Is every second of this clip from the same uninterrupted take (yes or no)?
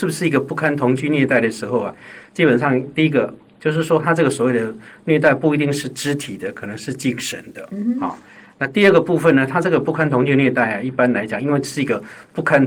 yes